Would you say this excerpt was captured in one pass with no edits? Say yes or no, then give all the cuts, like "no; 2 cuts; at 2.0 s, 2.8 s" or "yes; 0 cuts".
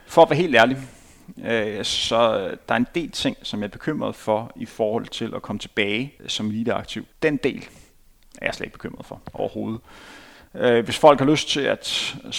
no; 2 cuts; at 6.2 s, 7.1 s